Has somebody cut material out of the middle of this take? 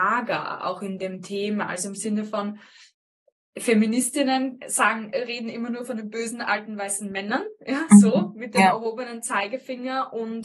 no; 0 cuts

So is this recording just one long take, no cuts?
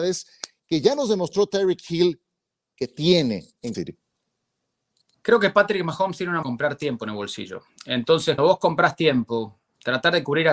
no; 3 cuts; at 3.7 s, 6.4 s, 8.4 s

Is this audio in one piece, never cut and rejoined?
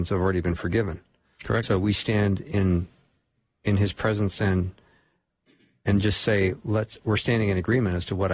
yes; 0 cuts

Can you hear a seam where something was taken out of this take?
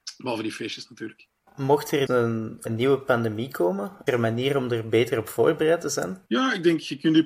yes; 5 cuts; at 1.4 s, 2.1 s, 2.7 s, 4.1 s, 6.3 s

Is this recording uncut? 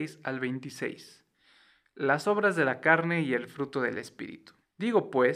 yes; 0 cuts

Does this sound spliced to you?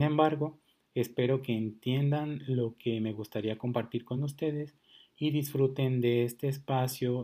no; 0 cuts

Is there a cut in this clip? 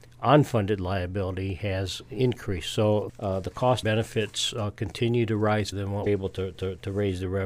yes; 5 cuts; at 3.1 s, 3.8 s, 5.7 s, 6.1 s, 6.5 s

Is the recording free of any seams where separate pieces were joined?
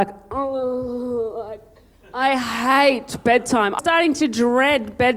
no; 1 cut; at 3.8 s

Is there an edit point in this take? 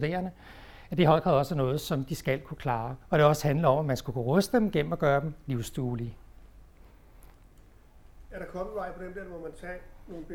yes; 1 cut; at 3.0 s

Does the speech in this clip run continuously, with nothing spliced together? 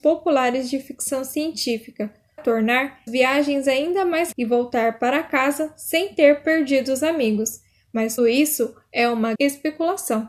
no; 5 cuts; at 2.4 s, 3.1 s, 4.3 s, 8.2 s, 9.3 s

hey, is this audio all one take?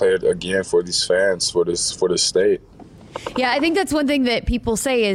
yes; 0 cuts

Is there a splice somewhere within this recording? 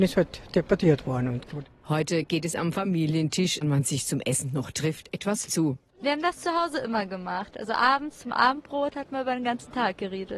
yes; 3 cuts; at 1.5 s, 3.6 s, 5.5 s

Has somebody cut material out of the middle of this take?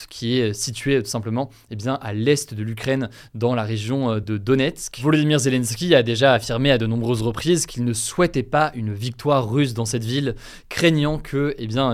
no; 0 cuts

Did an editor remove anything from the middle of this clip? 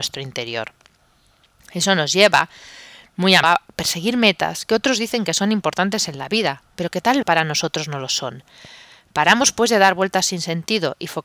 yes; 2 cuts; at 3.4 s, 7.2 s

